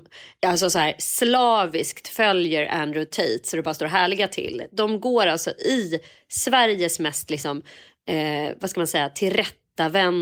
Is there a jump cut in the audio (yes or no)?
no